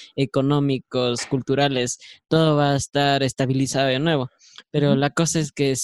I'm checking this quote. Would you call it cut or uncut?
uncut